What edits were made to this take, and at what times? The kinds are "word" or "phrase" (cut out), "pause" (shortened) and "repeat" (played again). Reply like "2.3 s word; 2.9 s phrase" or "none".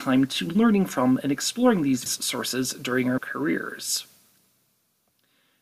2.1 s word; 3.2 s word